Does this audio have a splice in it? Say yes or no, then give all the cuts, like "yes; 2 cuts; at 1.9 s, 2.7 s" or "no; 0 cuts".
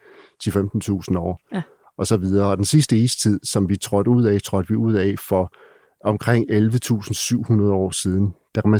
no; 0 cuts